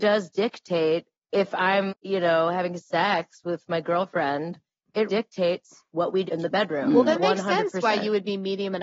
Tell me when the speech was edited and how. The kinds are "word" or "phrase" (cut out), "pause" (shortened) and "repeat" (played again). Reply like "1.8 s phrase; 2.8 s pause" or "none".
1.1 s pause; 1.9 s word; 5.1 s word; 6.3 s word; 7.1 s word